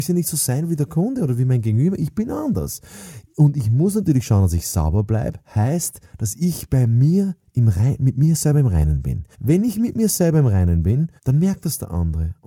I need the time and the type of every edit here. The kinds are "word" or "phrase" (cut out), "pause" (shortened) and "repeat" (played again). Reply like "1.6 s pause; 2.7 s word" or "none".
9.3 s pause; 11.2 s pause